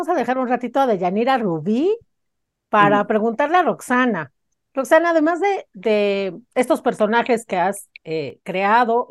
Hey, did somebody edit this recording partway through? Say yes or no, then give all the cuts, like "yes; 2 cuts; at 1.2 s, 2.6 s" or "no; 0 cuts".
no; 0 cuts